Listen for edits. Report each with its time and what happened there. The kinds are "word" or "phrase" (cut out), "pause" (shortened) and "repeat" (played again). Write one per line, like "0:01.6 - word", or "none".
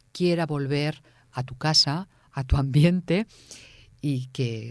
none